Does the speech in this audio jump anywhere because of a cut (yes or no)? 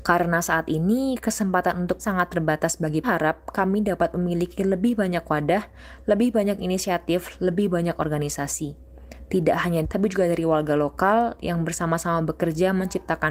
yes